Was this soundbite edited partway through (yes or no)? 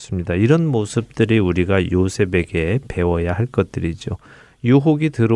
no